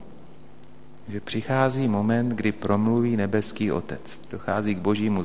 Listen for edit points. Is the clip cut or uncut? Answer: uncut